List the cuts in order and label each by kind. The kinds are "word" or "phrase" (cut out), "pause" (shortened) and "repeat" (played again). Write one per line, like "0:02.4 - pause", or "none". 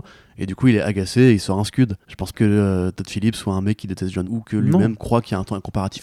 0:02.0 - pause
0:02.3 - word
0:04.2 - word